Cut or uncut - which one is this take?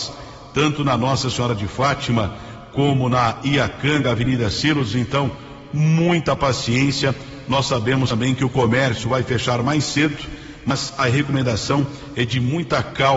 uncut